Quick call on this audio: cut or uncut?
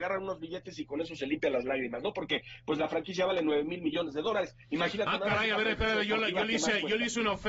uncut